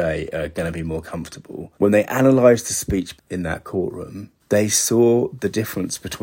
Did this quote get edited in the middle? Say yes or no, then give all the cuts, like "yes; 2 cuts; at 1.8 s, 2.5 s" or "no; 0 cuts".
yes; 3 cuts; at 1.7 s, 3.2 s, 4.4 s